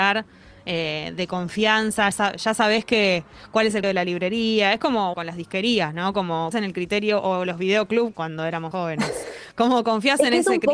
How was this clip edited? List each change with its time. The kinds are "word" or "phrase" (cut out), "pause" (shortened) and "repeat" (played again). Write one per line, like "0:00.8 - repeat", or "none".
0:02.1 - word
0:03.8 - word
0:05.1 - word
0:06.5 - word
0:08.1 - word
0:08.7 - word